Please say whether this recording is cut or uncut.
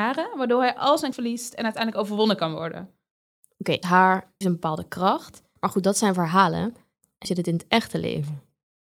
cut